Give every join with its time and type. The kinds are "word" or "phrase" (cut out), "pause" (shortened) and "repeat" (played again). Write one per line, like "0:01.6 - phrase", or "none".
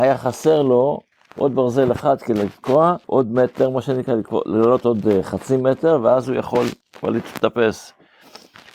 0:01.1 - pause
0:03.0 - pause
0:06.8 - pause